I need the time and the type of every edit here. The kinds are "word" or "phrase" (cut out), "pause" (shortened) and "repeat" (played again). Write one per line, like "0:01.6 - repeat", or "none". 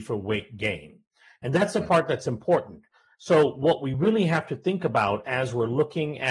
none